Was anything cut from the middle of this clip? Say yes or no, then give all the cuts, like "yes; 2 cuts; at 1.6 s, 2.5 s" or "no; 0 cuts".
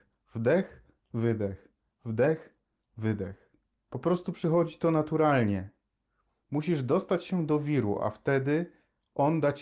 no; 0 cuts